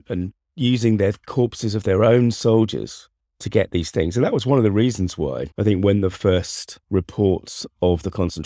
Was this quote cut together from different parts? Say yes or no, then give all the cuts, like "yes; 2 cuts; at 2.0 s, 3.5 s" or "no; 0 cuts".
yes; 3 cuts; at 3.2 s, 5.5 s, 6.8 s